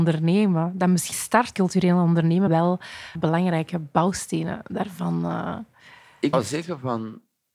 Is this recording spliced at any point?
yes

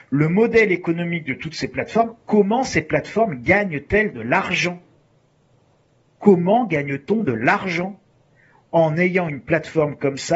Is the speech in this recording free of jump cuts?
yes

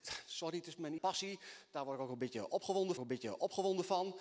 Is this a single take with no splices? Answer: no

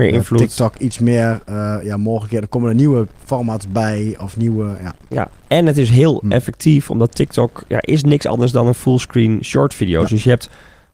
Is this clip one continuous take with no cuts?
yes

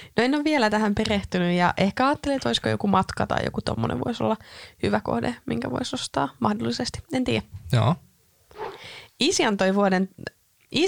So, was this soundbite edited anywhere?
no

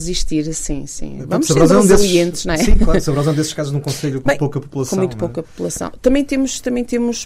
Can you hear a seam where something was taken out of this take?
yes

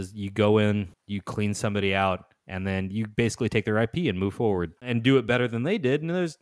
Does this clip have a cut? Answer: yes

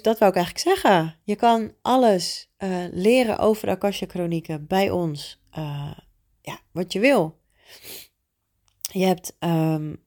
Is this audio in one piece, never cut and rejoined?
yes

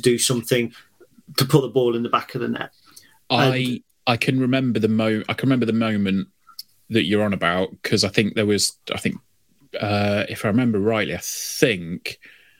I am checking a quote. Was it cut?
no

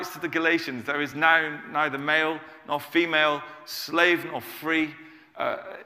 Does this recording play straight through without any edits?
yes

